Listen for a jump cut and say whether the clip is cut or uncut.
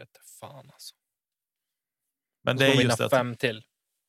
uncut